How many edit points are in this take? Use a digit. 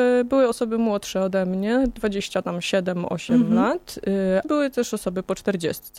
1